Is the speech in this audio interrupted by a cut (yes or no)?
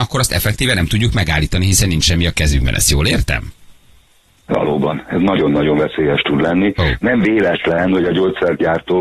no